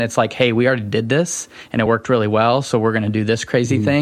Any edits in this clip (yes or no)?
no